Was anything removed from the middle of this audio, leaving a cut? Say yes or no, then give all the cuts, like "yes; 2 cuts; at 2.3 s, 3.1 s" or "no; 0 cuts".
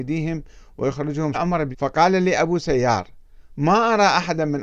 yes; 2 cuts; at 1.3 s, 1.7 s